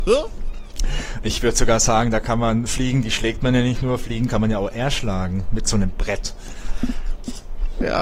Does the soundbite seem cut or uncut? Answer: uncut